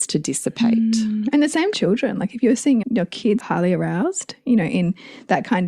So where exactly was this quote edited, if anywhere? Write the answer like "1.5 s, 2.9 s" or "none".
1.7 s, 2.8 s, 3.4 s